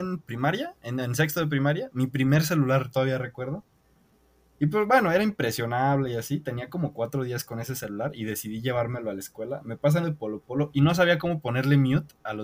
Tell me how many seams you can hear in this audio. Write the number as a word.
one